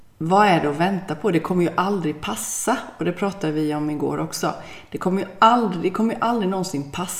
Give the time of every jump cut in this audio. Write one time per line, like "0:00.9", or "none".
none